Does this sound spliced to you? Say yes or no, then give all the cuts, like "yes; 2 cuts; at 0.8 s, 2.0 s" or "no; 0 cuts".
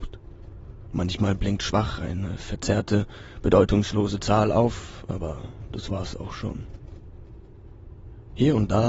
no; 0 cuts